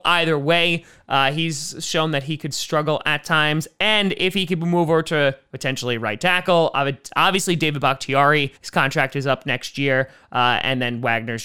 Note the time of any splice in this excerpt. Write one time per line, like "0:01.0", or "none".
0:08.6